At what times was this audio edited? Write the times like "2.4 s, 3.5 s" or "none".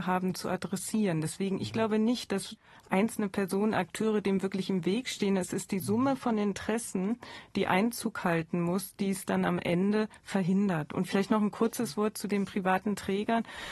10.2 s